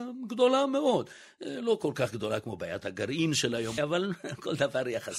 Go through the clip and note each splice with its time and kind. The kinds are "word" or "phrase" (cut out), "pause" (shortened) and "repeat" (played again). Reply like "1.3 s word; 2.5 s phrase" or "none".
3.8 s word